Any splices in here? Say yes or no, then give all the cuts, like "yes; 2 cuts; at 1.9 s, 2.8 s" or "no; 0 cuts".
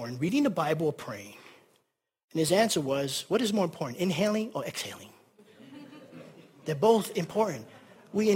no; 0 cuts